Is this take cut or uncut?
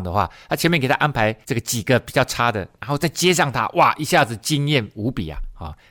cut